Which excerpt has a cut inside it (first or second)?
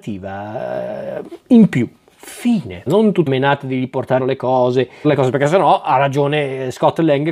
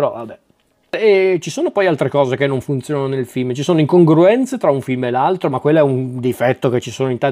first